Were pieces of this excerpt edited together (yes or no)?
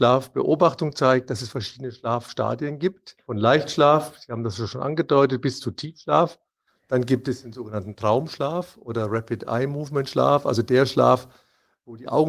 no